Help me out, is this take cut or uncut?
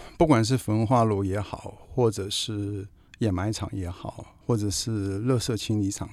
cut